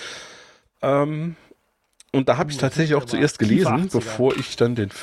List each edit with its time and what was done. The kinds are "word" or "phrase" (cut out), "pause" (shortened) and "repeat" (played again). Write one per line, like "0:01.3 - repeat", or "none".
none